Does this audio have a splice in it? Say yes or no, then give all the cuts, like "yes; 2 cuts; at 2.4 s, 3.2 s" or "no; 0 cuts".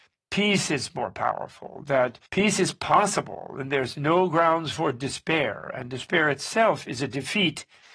yes; 1 cut; at 2.3 s